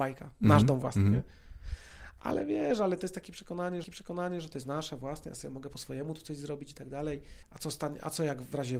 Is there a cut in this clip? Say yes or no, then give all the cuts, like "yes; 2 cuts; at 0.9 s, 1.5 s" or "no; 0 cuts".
yes; 2 cuts; at 3.8 s, 7.4 s